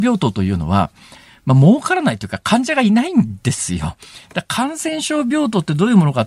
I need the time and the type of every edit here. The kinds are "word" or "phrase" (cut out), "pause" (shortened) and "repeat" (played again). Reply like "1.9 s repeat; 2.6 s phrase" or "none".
none